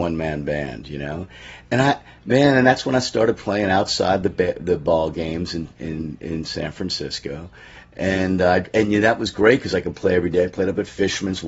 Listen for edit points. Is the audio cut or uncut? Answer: uncut